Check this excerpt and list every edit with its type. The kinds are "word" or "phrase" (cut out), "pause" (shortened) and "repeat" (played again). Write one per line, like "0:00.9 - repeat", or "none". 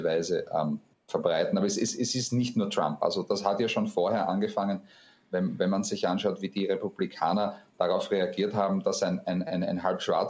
none